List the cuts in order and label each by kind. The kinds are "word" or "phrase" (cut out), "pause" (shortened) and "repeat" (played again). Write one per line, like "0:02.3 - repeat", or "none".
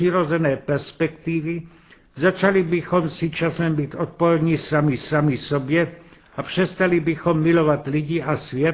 0:05.0 - repeat